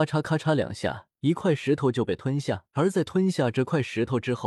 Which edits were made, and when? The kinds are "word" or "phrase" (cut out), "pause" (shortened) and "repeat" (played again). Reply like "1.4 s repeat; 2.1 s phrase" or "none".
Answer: 1.1 s pause; 2.7 s pause